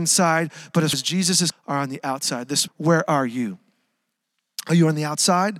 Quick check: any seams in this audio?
yes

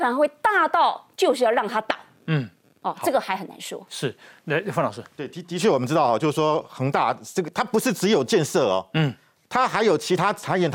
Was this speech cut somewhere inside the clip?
no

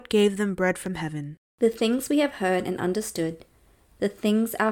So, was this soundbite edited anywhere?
yes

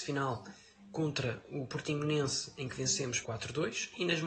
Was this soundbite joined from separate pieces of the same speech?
yes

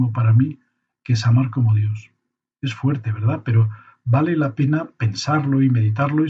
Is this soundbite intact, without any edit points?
yes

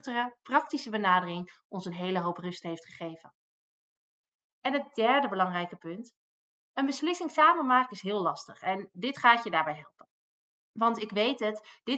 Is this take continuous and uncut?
yes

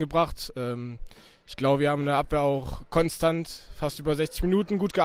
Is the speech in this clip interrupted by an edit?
no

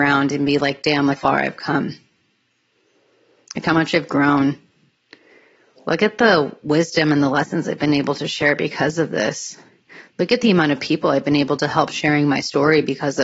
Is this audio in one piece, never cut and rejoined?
no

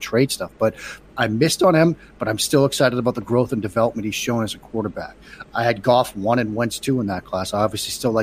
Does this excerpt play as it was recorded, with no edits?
yes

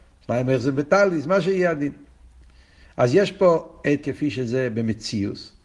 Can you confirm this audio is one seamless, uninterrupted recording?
no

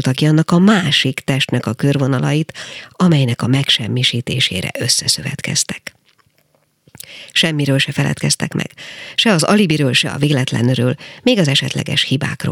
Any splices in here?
no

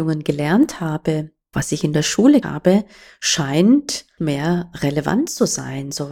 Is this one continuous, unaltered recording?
no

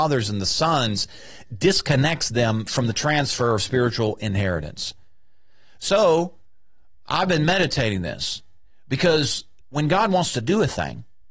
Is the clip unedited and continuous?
yes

